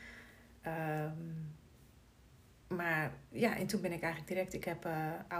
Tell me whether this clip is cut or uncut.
uncut